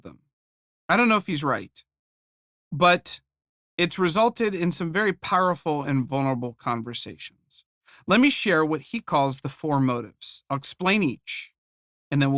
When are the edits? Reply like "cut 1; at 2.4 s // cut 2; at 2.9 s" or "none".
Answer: none